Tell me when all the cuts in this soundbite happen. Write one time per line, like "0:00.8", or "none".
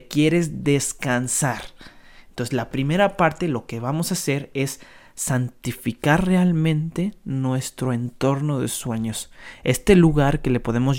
none